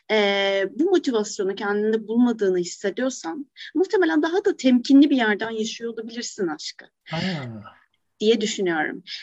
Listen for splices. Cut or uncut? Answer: uncut